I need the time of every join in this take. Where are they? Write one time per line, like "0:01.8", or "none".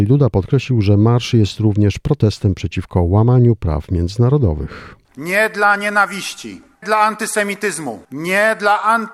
0:05.0
0:06.8